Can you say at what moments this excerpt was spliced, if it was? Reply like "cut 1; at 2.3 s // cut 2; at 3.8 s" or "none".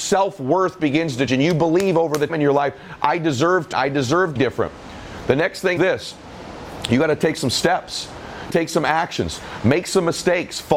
cut 1; at 1.3 s // cut 2; at 2.3 s // cut 3; at 3.7 s // cut 4; at 4.4 s // cut 5; at 5.8 s // cut 6; at 8.5 s